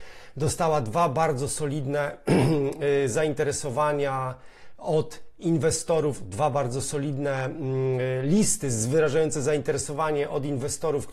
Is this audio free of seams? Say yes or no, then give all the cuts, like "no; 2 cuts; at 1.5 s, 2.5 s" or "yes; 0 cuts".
yes; 0 cuts